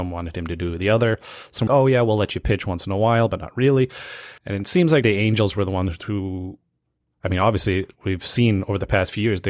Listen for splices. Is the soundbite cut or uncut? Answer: cut